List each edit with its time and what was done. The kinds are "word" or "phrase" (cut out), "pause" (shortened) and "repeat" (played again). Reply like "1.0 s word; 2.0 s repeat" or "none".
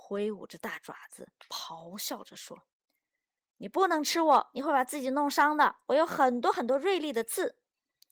2.7 s pause